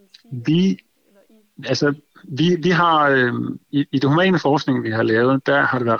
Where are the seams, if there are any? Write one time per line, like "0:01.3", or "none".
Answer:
none